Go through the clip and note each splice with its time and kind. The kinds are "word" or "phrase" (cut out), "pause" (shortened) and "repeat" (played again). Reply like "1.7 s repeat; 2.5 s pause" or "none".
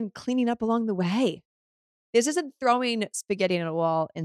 none